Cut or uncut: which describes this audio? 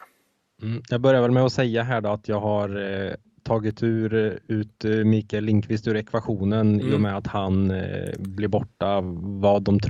uncut